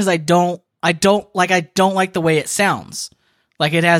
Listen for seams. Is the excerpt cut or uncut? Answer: uncut